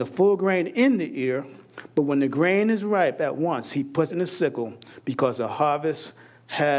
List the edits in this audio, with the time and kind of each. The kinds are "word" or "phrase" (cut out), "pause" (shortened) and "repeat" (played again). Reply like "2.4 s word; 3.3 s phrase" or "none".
4.1 s word